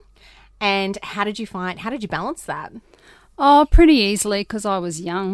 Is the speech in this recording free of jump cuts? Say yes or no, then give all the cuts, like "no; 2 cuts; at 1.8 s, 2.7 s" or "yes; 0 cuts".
yes; 0 cuts